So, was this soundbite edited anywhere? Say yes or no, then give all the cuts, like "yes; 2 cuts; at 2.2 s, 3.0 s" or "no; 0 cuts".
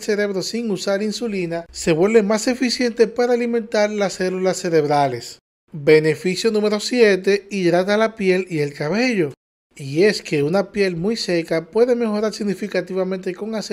no; 0 cuts